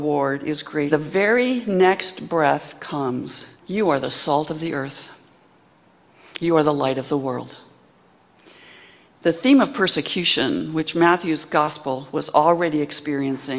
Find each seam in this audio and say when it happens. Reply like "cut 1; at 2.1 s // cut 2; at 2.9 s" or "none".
cut 1; at 0.9 s // cut 2; at 3.6 s